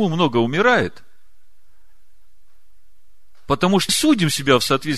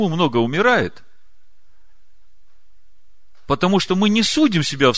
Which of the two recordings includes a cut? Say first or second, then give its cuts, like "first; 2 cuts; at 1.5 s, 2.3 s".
first; 1 cut; at 3.9 s